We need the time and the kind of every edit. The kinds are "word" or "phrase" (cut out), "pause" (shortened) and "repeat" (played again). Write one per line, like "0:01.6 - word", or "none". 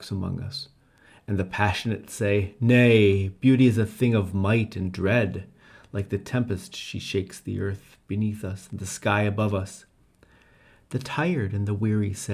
none